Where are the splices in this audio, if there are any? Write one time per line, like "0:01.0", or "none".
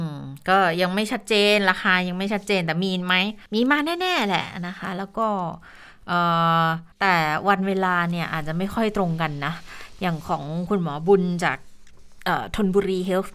0:03.5
0:06.9